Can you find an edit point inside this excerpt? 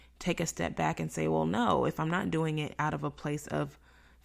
no; 0 cuts

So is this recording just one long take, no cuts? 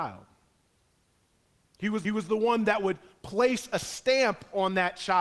no; 1 cut; at 2.0 s

